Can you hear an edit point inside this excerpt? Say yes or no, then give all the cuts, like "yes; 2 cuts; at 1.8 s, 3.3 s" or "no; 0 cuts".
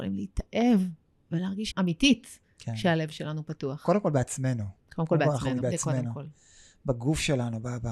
yes; 2 cuts; at 1.7 s, 5.6 s